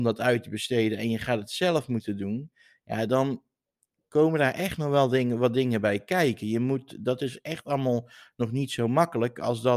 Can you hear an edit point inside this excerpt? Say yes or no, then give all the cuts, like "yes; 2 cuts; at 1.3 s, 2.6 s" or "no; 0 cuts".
no; 0 cuts